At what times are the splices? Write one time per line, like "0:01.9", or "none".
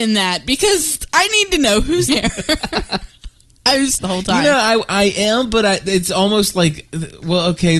0:02.1
0:04.0